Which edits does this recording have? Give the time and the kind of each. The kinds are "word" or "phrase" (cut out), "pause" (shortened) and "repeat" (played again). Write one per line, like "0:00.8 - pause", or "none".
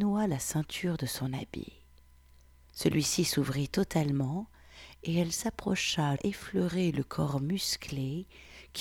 0:06.2 - word